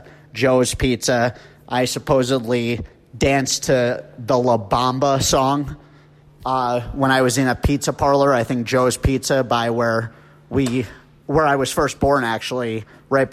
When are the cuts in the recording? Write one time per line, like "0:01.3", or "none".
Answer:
none